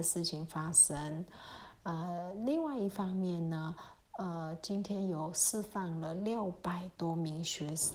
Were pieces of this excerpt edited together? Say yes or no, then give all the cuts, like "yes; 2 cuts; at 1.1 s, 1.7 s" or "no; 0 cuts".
no; 0 cuts